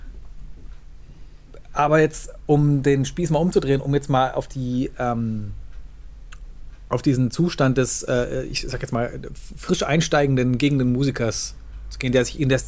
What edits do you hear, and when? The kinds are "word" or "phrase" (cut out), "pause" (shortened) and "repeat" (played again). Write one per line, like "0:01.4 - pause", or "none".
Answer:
none